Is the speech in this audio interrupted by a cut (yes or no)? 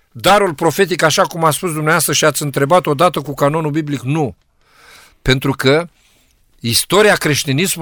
no